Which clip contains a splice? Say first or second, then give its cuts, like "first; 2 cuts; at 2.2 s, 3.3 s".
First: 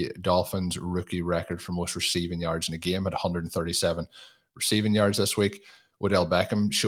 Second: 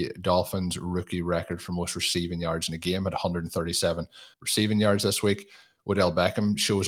second; 1 cut; at 4.3 s